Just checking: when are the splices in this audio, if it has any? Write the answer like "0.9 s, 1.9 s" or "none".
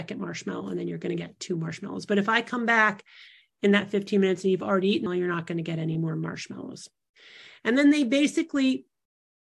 5.1 s